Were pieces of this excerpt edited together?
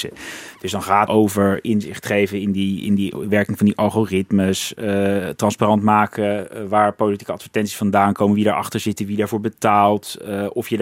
yes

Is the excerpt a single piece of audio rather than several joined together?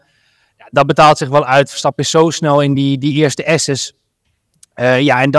yes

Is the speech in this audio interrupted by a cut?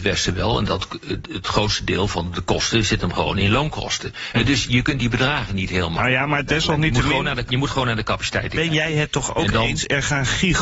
yes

